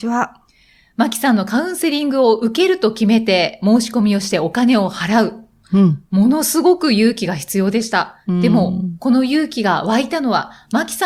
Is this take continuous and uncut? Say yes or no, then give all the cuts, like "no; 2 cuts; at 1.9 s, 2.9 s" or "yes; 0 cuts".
no; 1 cut; at 8.2 s